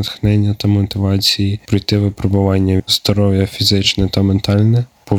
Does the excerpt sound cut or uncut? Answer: cut